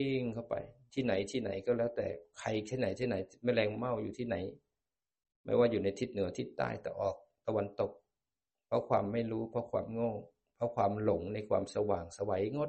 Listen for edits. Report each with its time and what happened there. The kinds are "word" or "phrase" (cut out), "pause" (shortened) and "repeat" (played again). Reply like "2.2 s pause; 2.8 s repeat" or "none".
none